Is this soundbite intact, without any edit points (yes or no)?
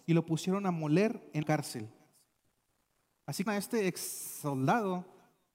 no